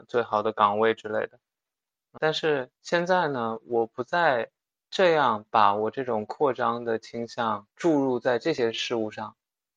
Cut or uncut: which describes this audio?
cut